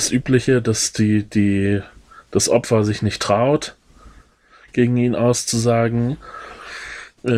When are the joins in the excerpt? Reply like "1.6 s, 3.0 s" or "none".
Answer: none